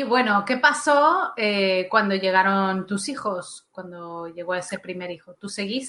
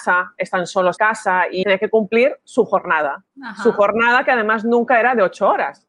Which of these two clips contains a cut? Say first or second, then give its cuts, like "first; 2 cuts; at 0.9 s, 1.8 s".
second; 3 cuts; at 1.0 s, 1.6 s, 3.3 s